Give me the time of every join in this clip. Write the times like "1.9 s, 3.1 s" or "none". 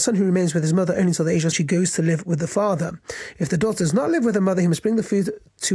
1.5 s